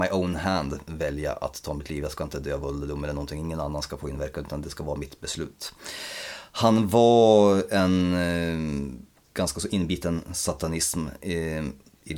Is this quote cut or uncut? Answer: uncut